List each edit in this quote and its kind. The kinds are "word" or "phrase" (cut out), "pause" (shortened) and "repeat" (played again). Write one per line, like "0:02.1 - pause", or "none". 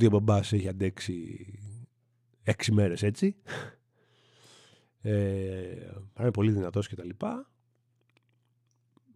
none